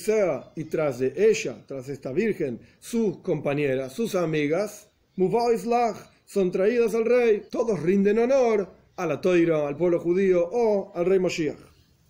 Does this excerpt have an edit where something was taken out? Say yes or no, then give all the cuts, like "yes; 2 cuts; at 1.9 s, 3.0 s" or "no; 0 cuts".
yes; 2 cuts; at 7.5 s, 8.9 s